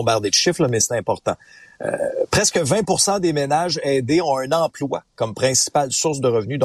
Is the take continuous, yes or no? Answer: yes